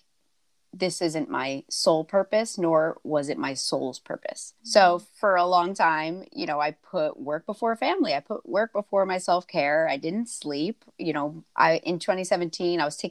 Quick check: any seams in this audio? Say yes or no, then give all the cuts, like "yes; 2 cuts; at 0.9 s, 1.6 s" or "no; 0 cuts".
yes; 2 cuts; at 4.6 s, 11.5 s